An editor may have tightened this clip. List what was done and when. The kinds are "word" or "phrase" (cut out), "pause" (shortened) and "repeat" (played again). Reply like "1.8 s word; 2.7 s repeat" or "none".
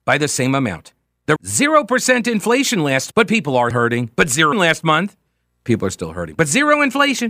1.4 s word; 3.1 s word; 3.7 s word; 4.5 s word; 5.7 s word